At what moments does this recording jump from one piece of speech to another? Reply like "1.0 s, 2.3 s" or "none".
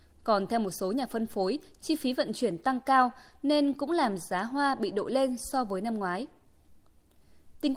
none